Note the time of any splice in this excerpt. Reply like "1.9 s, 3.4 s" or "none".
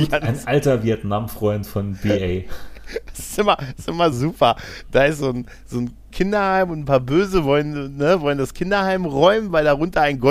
4.1 s